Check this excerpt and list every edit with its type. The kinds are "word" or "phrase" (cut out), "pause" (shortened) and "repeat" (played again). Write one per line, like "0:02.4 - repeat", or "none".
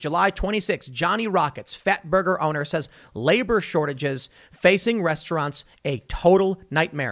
none